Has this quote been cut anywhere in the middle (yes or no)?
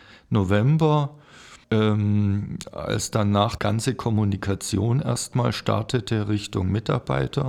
yes